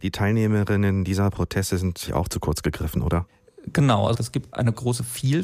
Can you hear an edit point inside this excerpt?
yes; 1 cut; at 2.1 s

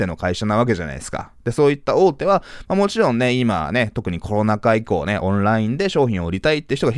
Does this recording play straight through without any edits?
yes; 0 cuts

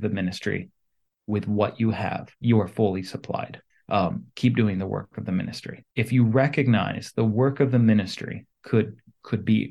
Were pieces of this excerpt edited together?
yes; 4 cuts; at 2.3 s, 3.7 s, 5.9 s, 8.5 s

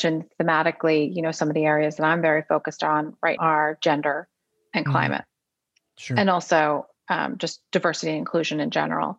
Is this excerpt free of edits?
no; 1 cut; at 3.4 s

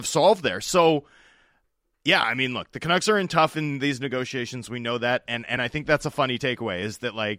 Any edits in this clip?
no; 0 cuts

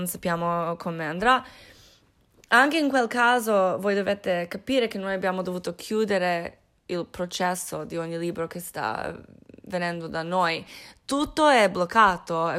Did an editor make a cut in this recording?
no; 0 cuts

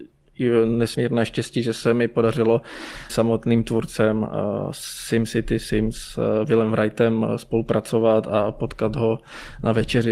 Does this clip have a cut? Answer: yes; 1 cut; at 3.1 s

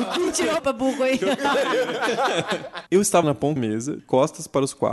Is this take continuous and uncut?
no; 4 cuts; at 2.9 s, 3.2 s, 3.6 s, 4.0 s

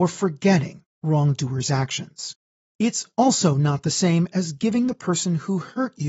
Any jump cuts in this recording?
no; 0 cuts

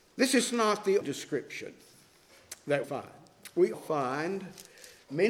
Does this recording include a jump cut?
yes; 3 cuts; at 1.0 s, 2.8 s, 3.7 s

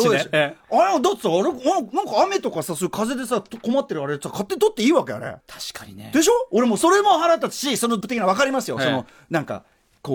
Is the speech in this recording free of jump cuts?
no; 2 cuts; at 5.4 s, 8.0 s

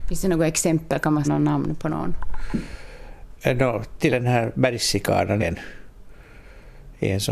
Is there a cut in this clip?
yes; 3 cuts; at 1.2 s, 4.1 s, 5.4 s

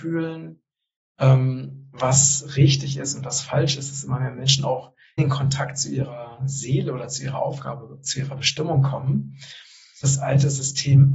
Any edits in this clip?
yes; 2 cuts; at 5.2 s, 10.0 s

